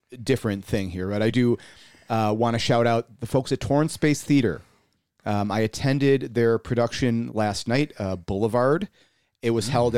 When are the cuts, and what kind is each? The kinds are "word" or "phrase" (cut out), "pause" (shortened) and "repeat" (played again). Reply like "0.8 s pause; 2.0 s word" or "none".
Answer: none